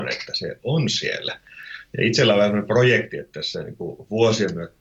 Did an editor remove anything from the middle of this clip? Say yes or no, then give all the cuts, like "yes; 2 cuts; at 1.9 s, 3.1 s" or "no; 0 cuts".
no; 0 cuts